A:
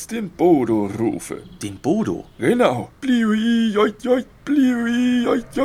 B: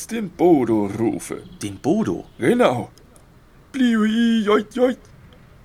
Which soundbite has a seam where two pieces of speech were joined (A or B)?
A